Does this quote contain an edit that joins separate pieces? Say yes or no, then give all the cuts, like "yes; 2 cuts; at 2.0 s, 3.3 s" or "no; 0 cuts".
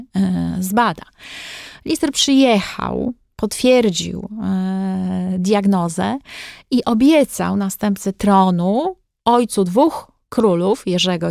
no; 0 cuts